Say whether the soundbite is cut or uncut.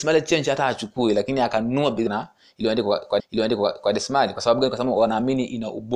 cut